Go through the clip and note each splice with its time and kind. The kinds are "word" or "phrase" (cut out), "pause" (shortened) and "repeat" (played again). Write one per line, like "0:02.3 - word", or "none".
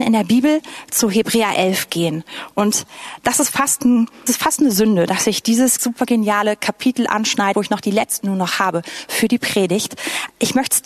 0:04.3 - word
0:05.8 - word
0:07.5 - word
0:08.2 - word